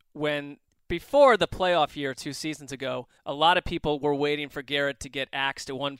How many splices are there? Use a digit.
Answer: 1